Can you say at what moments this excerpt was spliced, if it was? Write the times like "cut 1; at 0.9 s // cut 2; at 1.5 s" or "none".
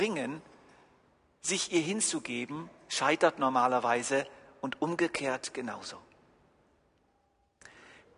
none